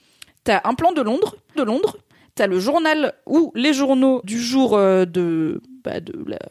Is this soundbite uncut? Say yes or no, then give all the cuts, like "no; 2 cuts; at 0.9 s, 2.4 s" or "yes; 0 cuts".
no; 2 cuts; at 1.6 s, 4.2 s